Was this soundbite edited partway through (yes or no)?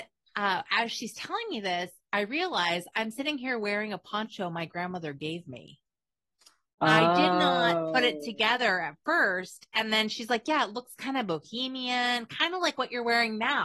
no